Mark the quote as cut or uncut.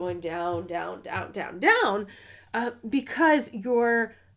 uncut